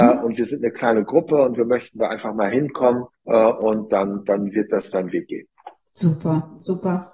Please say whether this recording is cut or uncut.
cut